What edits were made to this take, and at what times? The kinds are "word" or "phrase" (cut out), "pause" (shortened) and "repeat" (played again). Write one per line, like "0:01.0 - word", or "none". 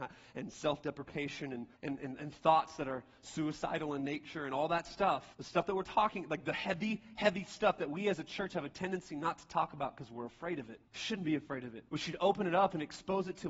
0:01.8 - pause
0:05.3 - pause
0:10.9 - pause
0:11.9 - pause

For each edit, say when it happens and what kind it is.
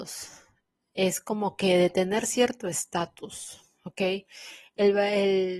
none

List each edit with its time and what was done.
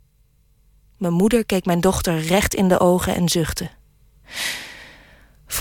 none

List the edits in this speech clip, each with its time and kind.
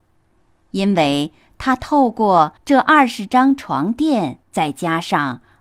0:02.6 - pause
0:04.4 - pause

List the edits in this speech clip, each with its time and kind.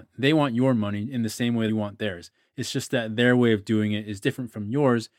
0:01.7 - phrase

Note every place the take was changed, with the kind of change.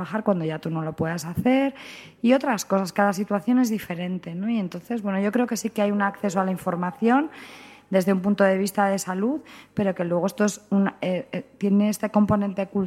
none

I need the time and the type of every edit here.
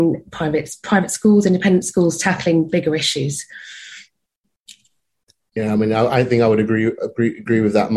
none

